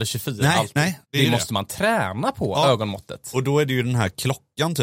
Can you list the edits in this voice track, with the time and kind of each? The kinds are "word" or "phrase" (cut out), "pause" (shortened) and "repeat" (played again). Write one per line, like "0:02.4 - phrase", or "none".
0:01.0 - pause